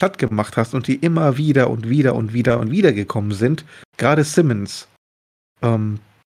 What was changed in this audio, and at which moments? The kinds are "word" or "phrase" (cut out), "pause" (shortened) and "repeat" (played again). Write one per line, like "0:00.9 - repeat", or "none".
none